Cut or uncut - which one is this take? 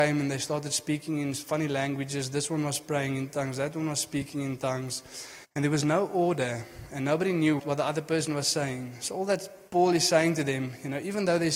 cut